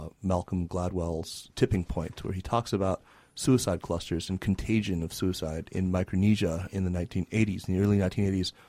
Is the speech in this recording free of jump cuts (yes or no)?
yes